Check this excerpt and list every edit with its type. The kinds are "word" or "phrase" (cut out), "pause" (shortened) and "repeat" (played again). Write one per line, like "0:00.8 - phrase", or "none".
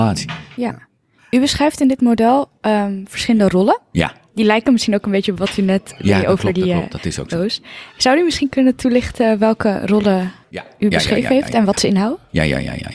0:10.4 - pause